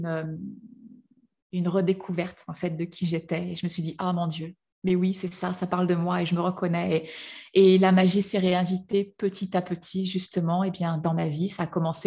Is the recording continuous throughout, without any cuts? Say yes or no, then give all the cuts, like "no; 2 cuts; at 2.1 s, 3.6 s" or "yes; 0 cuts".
yes; 0 cuts